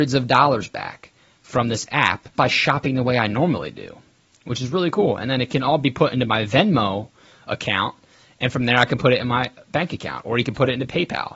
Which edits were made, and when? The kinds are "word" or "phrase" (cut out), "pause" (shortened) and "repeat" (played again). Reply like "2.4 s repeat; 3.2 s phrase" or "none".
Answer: 2.4 s word